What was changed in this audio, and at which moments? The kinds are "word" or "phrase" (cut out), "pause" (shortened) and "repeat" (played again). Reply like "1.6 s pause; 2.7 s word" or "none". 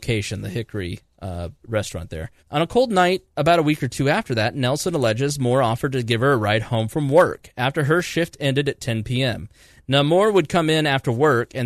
1.6 s pause; 2.4 s pause